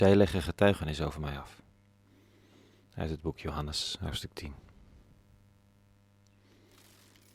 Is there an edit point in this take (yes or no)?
no